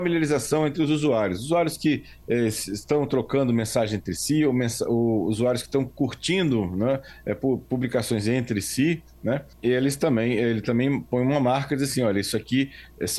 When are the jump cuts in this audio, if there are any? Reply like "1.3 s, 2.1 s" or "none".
9.5 s